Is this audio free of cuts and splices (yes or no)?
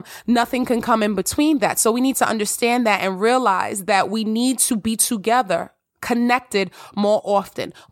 yes